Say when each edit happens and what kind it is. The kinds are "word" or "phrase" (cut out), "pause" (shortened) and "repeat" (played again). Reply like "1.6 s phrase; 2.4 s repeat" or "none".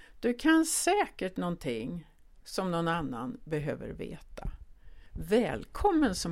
none